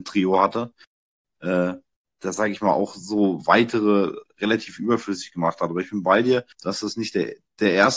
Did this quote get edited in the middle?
yes; 1 cut; at 6.5 s

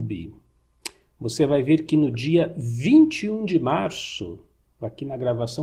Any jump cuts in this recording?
no; 0 cuts

